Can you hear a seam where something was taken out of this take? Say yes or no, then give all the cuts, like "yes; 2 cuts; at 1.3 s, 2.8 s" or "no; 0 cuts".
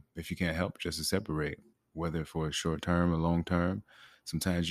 yes; 1 cut; at 1.7 s